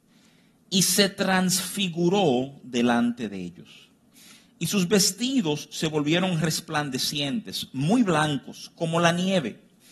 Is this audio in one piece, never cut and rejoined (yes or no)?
yes